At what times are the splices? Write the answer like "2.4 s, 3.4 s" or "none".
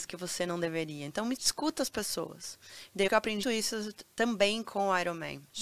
1.4 s, 3.1 s, 3.4 s